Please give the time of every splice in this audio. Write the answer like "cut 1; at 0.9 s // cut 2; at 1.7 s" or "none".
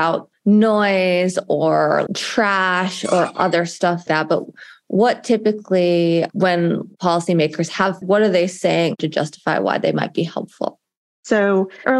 cut 1; at 2.1 s // cut 2; at 4.1 s // cut 3; at 8.0 s